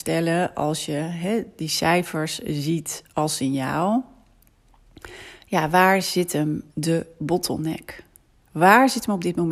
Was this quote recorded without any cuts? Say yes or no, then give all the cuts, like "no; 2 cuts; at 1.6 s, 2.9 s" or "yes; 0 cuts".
no; 1 cut; at 6.7 s